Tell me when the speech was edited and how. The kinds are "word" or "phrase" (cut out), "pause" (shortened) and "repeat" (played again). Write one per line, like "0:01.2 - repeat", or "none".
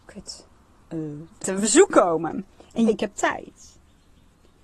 0:01.4 - word
0:02.9 - word